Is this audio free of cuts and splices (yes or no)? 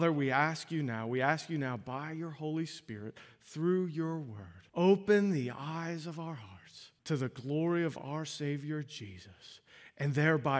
no